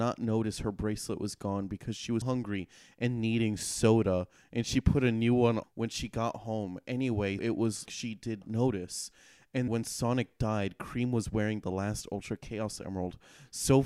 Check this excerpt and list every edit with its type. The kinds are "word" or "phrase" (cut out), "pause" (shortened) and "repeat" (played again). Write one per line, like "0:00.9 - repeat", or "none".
0:02.2 - word
0:05.6 - word
0:07.4 - word
0:07.9 - word
0:08.4 - word
0:09.7 - word